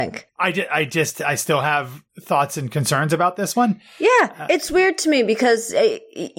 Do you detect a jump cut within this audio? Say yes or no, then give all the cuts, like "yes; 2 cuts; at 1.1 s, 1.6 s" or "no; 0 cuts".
yes; 1 cut; at 2.1 s